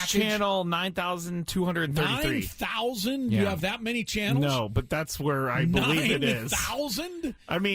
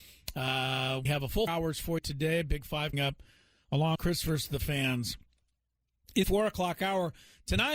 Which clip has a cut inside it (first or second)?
second